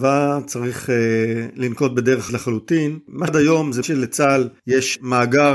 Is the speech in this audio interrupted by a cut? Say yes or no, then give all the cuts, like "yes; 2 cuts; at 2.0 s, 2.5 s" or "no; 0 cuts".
yes; 3 cuts; at 2.3 s, 3.3 s, 3.8 s